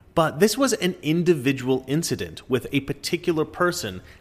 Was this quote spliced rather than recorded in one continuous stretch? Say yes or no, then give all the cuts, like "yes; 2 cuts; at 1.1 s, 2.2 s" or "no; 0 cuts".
no; 0 cuts